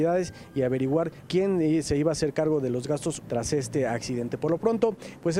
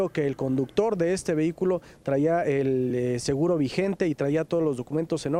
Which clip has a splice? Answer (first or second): first